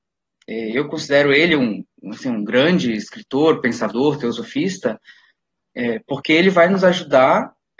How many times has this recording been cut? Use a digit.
0